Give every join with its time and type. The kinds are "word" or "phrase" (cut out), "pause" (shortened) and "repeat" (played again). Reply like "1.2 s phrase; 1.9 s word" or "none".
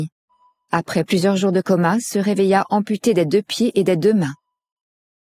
none